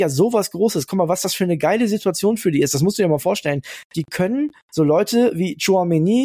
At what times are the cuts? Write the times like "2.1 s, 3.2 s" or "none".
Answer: none